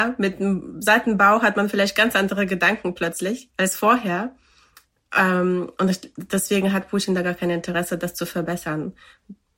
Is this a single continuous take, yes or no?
yes